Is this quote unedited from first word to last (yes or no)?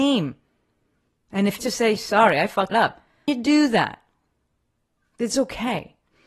no